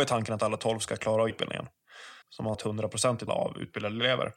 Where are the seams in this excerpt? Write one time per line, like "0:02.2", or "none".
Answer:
0:01.3
0:02.2
0:02.5
0:03.3

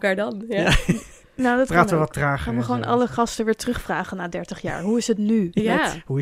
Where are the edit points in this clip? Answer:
none

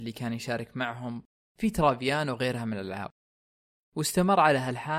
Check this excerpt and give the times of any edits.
none

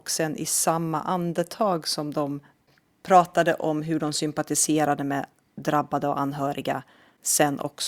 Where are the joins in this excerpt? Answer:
none

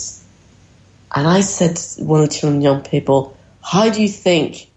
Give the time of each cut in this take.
none

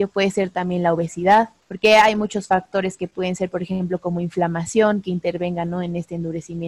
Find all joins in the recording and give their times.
none

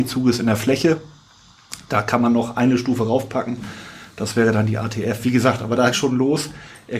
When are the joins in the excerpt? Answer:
0:05.9

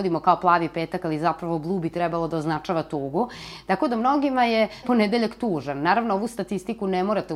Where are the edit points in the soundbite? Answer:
0:04.8

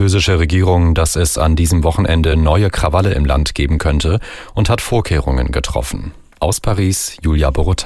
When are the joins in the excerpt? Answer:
none

